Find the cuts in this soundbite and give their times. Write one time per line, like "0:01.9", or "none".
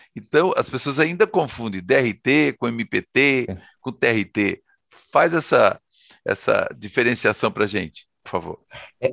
none